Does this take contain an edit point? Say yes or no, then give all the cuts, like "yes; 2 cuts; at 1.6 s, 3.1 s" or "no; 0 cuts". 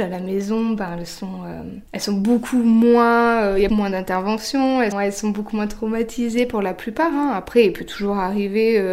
yes; 3 cuts; at 1.9 s, 3.7 s, 4.9 s